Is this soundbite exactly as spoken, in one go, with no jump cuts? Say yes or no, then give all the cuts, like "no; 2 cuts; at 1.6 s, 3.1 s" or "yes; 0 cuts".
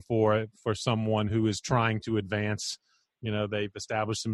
yes; 0 cuts